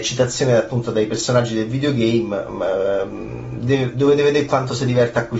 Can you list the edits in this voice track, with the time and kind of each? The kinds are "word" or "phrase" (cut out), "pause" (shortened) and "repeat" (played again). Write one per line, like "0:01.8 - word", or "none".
none